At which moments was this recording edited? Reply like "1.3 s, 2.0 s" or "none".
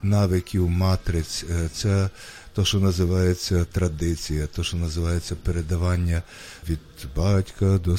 none